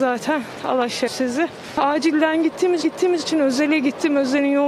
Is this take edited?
yes; 2 cuts; at 1.1 s, 2.8 s

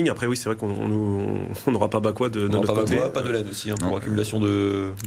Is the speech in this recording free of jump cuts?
yes; 0 cuts

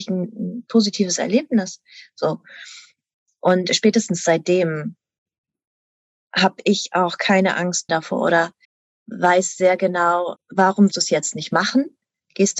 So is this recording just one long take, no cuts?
no; 4 cuts; at 7.9 s, 8.6 s, 10.4 s, 10.9 s

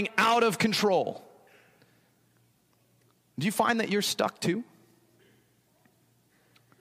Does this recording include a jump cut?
no; 0 cuts

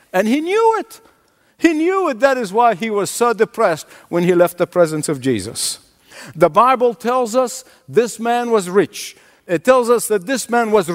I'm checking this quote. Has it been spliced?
no; 0 cuts

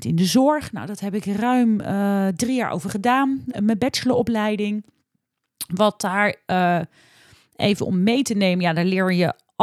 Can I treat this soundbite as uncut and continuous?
yes; 0 cuts

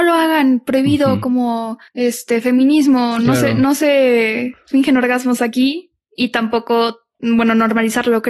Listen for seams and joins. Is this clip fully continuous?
no; 1 cut; at 1.9 s

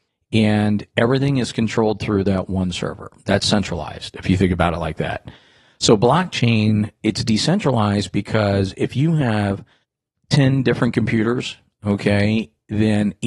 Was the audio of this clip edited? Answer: no; 0 cuts

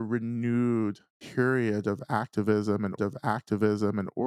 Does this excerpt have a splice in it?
yes; 1 cut; at 3.0 s

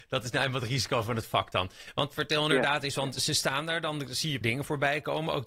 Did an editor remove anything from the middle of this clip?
yes; 1 cut; at 4.4 s

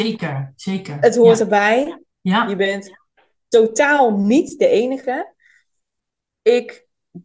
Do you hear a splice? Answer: no; 0 cuts

